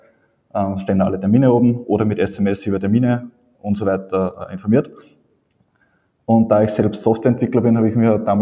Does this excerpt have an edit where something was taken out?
no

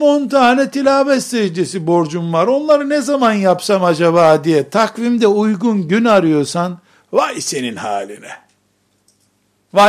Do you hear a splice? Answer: no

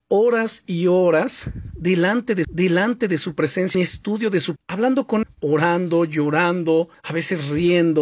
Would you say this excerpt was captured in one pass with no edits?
no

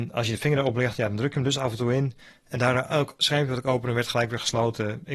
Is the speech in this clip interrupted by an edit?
no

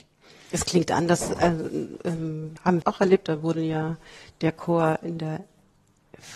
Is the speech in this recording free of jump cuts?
no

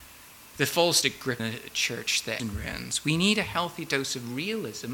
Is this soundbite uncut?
no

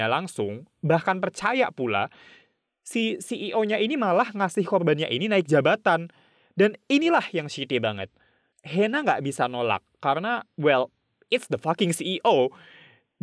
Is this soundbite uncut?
yes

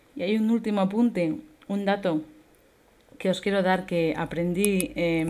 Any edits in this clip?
no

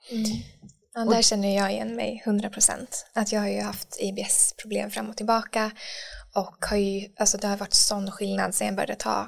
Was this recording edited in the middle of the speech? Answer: no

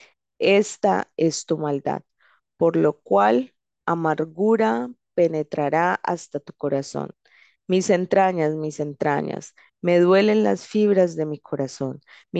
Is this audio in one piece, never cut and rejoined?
yes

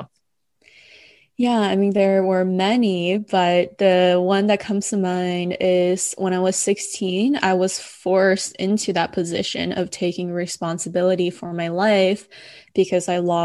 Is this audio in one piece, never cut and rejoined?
yes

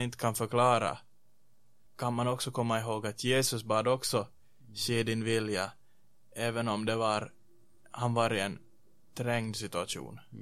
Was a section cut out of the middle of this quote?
yes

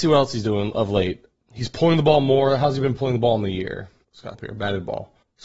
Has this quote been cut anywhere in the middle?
yes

